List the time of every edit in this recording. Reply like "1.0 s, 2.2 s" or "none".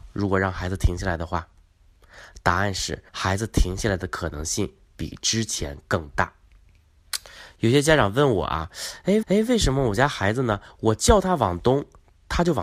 3.1 s, 9.2 s